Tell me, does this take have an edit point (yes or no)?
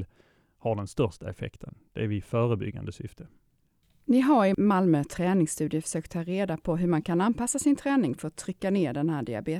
no